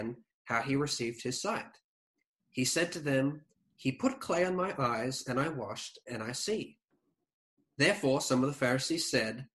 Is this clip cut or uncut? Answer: uncut